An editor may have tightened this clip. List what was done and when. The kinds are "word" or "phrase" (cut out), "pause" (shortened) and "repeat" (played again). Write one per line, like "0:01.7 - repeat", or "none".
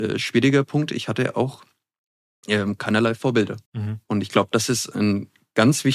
0:03.6 - pause